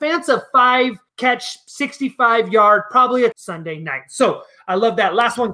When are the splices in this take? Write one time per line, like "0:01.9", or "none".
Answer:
0:01.1
0:03.3